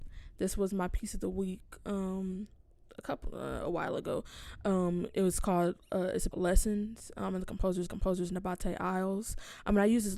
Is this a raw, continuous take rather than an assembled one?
no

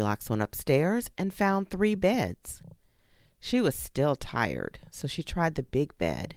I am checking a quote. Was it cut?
no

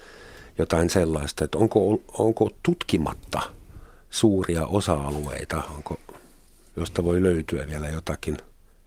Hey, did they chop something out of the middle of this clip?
no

